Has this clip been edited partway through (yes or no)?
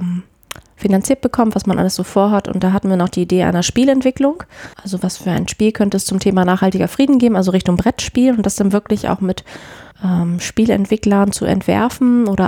yes